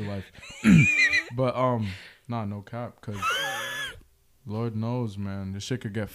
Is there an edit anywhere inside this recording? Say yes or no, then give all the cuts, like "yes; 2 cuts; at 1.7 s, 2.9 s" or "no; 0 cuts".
no; 0 cuts